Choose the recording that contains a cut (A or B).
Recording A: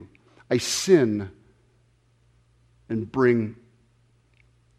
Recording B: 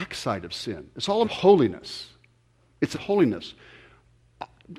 B